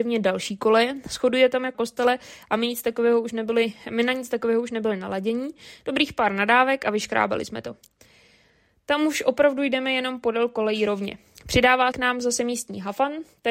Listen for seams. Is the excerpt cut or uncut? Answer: cut